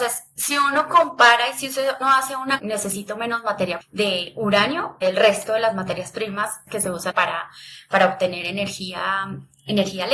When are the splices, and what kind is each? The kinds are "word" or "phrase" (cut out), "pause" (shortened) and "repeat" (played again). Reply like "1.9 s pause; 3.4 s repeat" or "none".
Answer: 2.0 s word; 2.6 s word; 3.8 s word; 5.0 s word; 6.7 s word; 7.1 s word

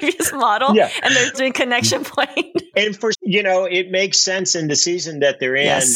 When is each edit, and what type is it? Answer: 1.3 s word; 2.7 s word; 3.1 s word

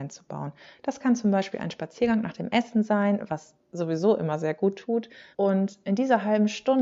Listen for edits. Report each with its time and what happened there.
5.3 s pause

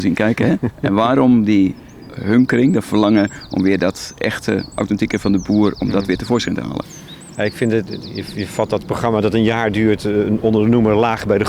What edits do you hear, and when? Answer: 7.9 s word

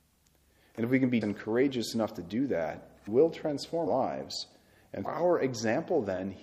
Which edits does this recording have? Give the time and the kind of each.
1.2 s word; 3.1 s word; 3.9 s word; 5.0 s word

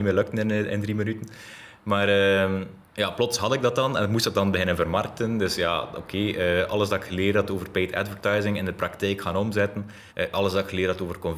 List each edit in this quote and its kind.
2.9 s pause; 10.1 s pause

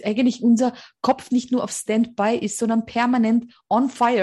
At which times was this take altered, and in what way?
none

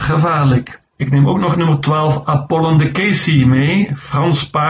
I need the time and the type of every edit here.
none

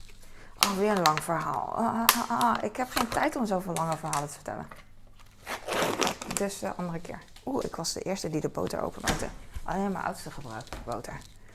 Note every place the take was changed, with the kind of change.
none

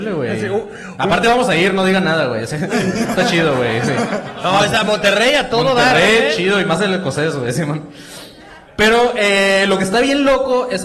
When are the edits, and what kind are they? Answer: 8.7 s pause

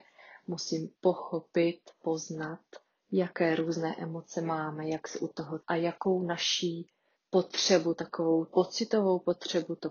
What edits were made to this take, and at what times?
0.9 s pause; 2.9 s pause; 5.6 s word; 7.1 s pause; 8.5 s word

